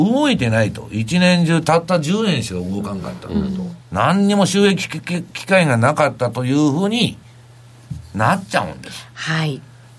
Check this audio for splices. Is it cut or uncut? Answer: cut